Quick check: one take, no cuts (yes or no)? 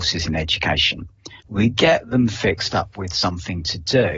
no